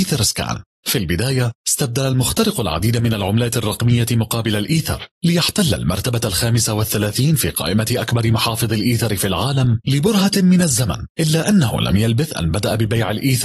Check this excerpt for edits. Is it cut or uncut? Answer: uncut